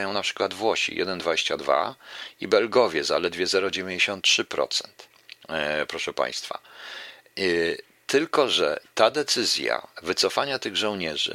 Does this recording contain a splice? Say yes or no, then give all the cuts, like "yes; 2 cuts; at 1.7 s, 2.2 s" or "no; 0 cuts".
no; 0 cuts